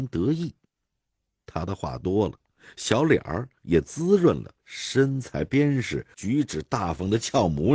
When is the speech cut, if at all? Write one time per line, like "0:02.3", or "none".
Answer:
0:04.6
0:06.1